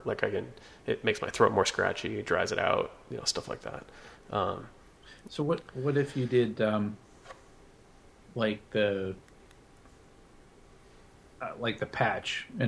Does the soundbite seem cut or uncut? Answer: uncut